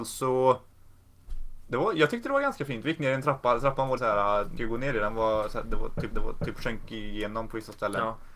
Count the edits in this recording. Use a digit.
3